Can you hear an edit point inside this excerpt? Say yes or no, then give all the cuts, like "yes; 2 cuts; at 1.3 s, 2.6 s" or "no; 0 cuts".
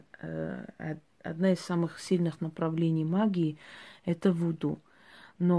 no; 0 cuts